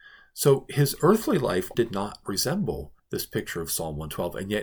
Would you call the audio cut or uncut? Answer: cut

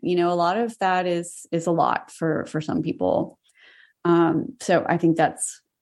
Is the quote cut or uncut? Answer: uncut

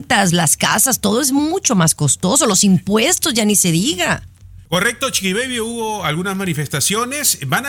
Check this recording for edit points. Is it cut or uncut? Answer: cut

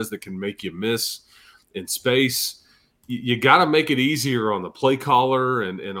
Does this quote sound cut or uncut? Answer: uncut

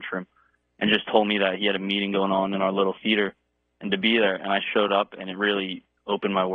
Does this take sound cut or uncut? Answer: uncut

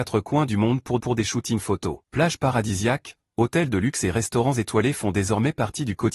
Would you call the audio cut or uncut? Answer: cut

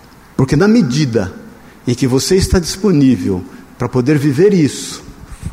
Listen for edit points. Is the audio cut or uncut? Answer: uncut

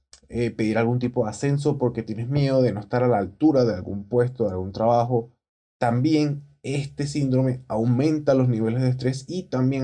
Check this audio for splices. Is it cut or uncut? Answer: uncut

